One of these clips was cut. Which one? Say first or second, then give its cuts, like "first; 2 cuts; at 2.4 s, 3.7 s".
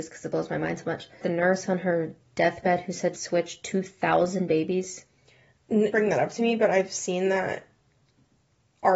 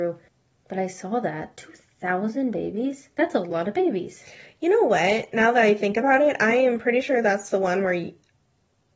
first; 3 cuts; at 1.2 s, 3.1 s, 5.9 s